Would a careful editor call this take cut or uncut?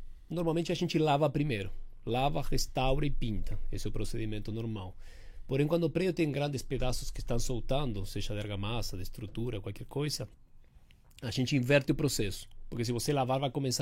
uncut